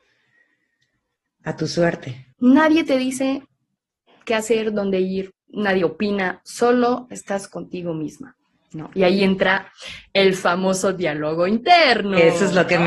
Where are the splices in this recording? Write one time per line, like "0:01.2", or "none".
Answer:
0:02.3
0:05.4